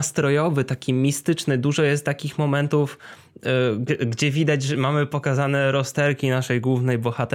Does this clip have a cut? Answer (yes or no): no